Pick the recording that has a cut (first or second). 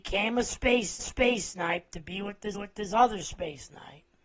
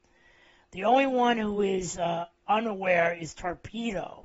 first